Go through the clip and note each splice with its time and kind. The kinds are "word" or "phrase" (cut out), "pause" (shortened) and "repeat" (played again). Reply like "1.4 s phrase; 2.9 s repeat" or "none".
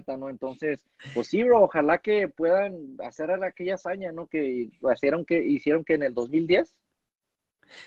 none

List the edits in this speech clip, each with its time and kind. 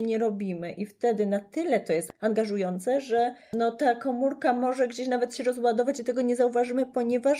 none

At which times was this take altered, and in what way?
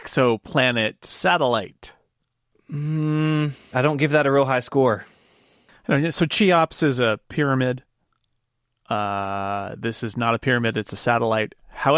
3.7 s word

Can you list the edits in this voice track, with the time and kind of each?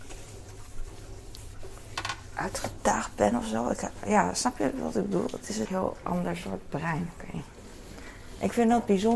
5.7 s word

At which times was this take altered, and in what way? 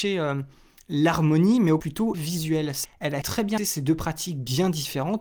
1.8 s word; 2.1 s word; 2.8 s word; 3.2 s word; 3.6 s word

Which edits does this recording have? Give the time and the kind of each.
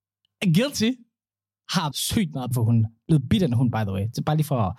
1.9 s word; 2.5 s word

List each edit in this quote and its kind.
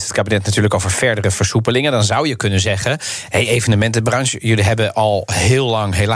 none

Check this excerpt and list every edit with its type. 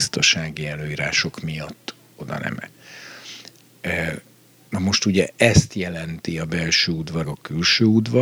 2.6 s word; 7.2 s word

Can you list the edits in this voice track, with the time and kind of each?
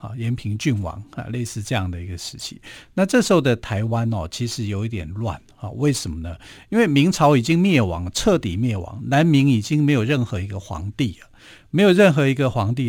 none

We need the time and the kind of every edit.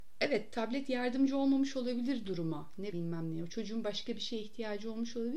2.9 s phrase

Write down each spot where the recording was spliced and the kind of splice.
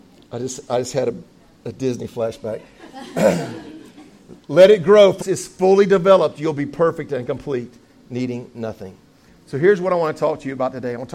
5.2 s phrase

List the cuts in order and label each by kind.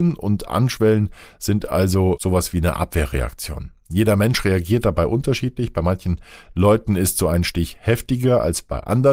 none

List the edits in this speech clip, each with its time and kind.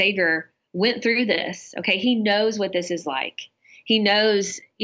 none

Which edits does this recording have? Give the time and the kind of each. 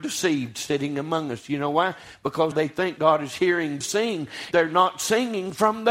2.5 s word; 3.0 s word; 3.8 s word; 4.5 s word

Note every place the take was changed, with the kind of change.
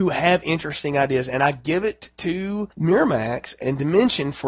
2.7 s pause

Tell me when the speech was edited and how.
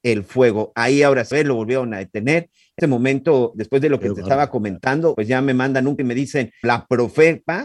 1.3 s word; 2.8 s word; 3.5 s word; 5.1 s word; 6.0 s word; 6.6 s word

